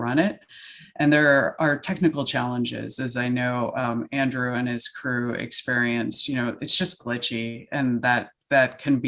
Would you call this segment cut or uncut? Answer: uncut